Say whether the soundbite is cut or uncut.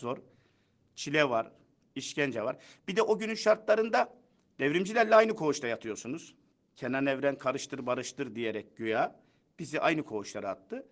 uncut